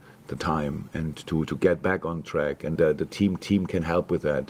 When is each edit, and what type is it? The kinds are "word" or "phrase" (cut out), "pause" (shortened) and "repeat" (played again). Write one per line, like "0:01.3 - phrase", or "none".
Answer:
0:02.8 - word
0:03.4 - repeat